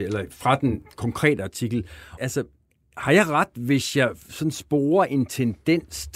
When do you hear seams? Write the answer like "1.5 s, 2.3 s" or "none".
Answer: 2.2 s